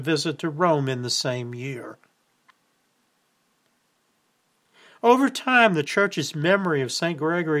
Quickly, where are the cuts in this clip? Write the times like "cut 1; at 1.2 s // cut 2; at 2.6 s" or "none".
none